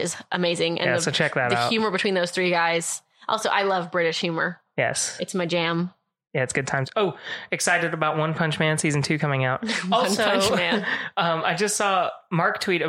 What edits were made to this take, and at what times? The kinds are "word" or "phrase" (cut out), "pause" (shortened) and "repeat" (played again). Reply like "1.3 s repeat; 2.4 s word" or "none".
none